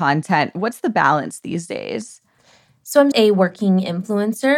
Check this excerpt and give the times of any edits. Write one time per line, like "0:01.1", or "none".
0:03.1